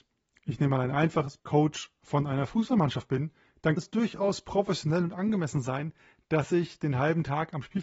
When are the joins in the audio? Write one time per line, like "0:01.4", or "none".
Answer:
0:01.4
0:03.8